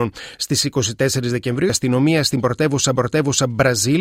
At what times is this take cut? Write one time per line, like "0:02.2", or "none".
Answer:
0:01.7
0:03.0